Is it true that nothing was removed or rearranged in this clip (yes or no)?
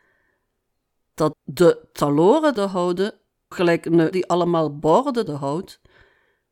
no